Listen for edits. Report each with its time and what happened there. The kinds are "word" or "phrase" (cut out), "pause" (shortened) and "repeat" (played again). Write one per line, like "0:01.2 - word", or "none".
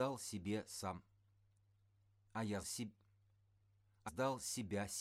0:02.6 - word
0:04.1 - word